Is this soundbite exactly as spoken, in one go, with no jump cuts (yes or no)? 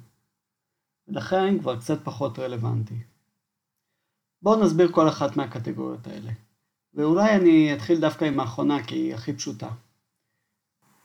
yes